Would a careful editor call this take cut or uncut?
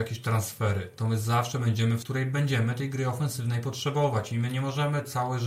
cut